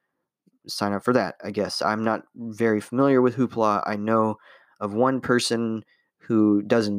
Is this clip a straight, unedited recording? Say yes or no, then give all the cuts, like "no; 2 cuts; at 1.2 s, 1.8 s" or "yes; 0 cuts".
yes; 0 cuts